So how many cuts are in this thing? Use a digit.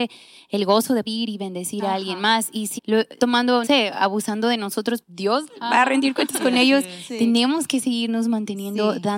5